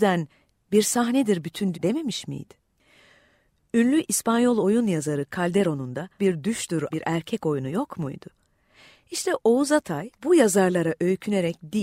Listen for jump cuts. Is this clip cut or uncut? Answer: cut